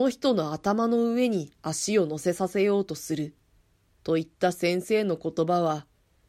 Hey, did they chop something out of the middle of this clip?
no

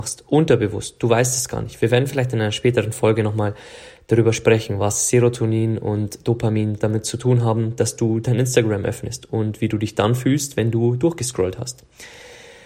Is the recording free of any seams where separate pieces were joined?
yes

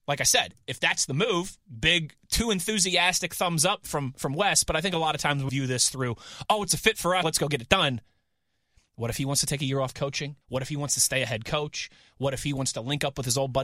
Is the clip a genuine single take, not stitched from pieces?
no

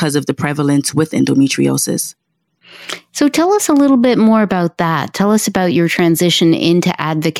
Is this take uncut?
yes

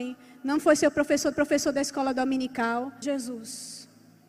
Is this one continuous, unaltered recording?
no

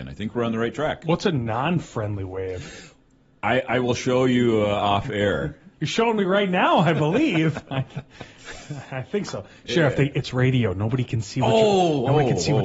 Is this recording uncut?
no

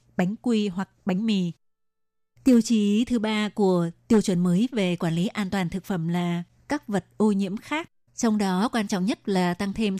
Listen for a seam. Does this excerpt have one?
no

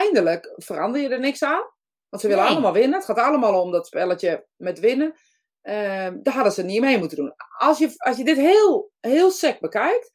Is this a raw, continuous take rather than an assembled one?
yes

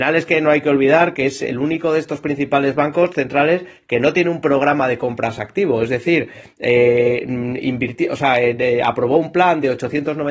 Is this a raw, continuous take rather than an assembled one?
yes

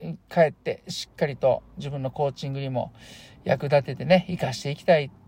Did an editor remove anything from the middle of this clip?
no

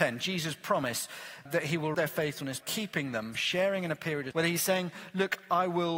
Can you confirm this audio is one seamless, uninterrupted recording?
no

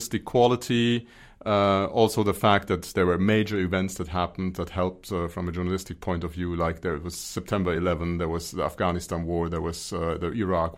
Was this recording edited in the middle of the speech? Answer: no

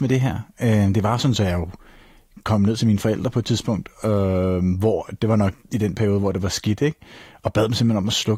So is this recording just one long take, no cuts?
yes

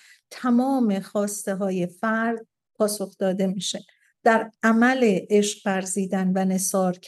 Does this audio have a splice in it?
no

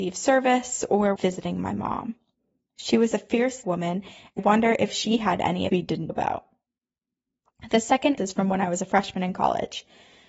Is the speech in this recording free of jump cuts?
no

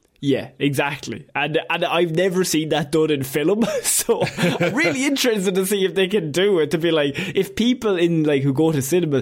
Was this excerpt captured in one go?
yes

